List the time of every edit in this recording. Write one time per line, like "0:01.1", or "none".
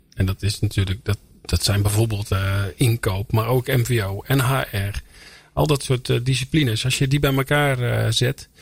none